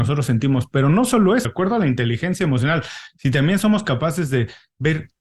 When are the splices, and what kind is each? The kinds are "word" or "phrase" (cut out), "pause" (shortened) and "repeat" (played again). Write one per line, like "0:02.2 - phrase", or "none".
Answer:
0:01.4 - word